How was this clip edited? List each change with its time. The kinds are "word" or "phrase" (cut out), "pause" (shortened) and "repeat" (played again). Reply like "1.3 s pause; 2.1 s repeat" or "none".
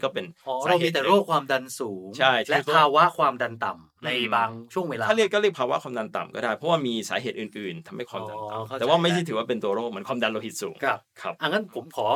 none